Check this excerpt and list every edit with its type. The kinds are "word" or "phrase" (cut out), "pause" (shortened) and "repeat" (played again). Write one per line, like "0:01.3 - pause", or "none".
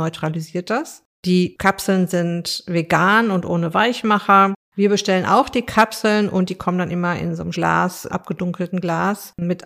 0:01.1 - pause
0:07.5 - word
0:08.1 - word